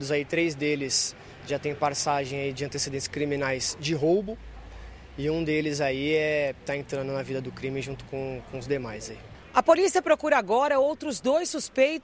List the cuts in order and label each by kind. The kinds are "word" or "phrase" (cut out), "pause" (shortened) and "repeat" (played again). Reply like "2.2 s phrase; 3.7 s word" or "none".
none